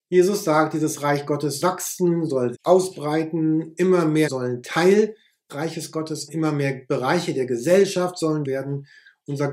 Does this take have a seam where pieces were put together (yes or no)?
yes